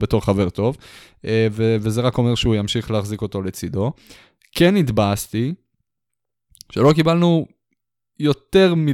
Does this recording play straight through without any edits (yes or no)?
yes